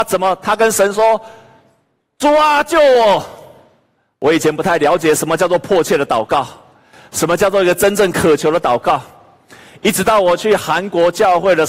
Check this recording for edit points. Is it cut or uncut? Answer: uncut